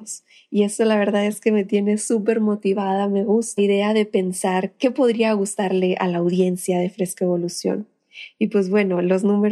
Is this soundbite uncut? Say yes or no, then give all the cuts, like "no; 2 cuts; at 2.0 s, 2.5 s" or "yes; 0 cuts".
no; 1 cut; at 3.6 s